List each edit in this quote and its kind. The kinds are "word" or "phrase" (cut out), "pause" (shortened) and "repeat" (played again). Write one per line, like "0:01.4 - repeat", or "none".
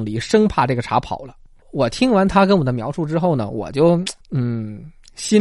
0:04.2 - pause